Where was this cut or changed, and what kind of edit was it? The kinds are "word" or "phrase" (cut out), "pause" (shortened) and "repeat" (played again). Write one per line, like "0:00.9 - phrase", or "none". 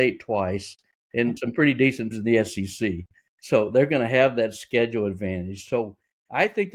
0:01.4 - word
0:02.1 - word